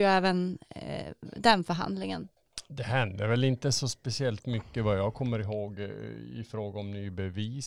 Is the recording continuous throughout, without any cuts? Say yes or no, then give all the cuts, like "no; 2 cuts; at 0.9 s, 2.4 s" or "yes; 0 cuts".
yes; 0 cuts